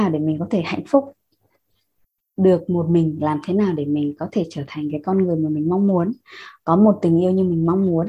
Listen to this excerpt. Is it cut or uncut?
uncut